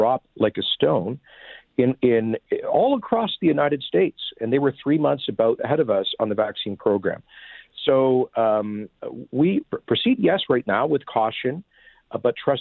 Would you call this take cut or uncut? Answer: cut